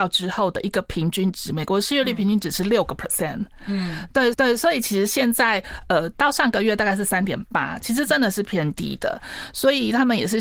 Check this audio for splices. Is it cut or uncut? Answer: cut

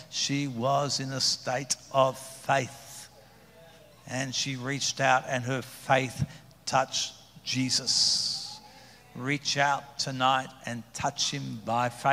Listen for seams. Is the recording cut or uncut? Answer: uncut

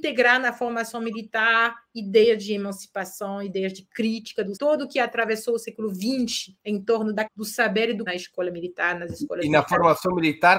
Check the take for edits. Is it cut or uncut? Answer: cut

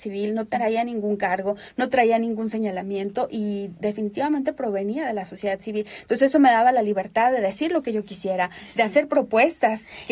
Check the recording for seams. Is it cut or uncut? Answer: uncut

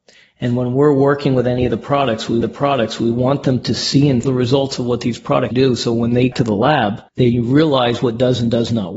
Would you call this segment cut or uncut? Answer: cut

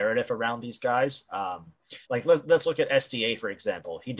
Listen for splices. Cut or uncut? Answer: cut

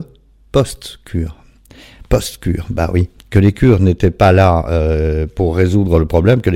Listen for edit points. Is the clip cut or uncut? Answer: uncut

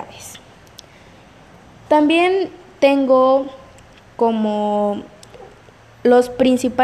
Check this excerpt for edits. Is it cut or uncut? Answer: uncut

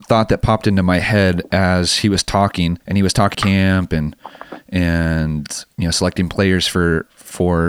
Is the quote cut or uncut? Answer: cut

